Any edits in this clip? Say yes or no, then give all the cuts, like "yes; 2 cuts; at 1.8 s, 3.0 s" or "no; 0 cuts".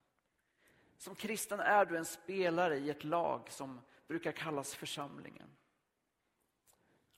no; 0 cuts